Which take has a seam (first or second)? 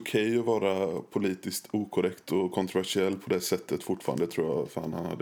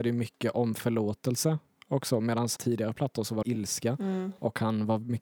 second